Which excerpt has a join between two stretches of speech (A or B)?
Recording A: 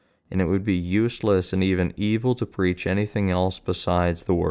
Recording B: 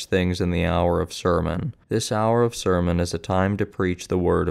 B